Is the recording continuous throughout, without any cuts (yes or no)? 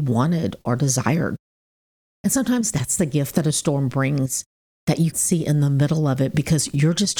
no